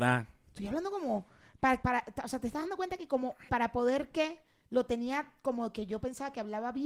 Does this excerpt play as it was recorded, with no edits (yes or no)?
no